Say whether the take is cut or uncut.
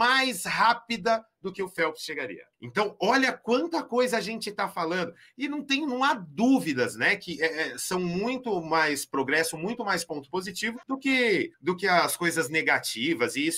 cut